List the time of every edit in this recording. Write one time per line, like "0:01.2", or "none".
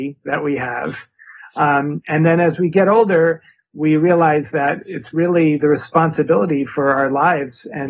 none